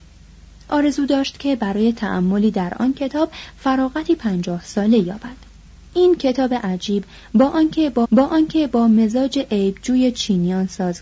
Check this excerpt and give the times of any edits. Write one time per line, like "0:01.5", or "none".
0:05.7
0:08.0